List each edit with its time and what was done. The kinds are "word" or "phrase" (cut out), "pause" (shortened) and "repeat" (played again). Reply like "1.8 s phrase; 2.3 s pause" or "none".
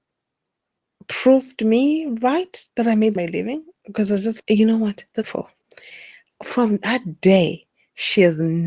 2.7 s pause; 3.2 s phrase; 4.4 s word; 5.2 s phrase